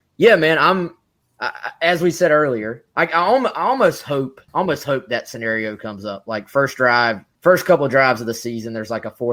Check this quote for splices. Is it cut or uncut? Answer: cut